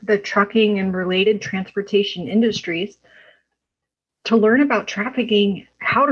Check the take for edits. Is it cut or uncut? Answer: uncut